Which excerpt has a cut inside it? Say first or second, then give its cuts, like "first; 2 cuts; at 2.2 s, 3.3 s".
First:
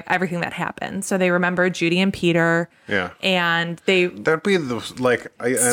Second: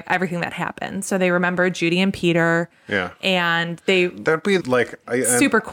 second; 1 cut; at 4.6 s